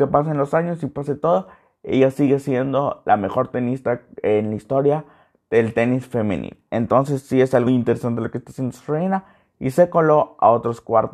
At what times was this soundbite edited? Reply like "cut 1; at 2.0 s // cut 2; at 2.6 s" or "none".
cut 1; at 7.7 s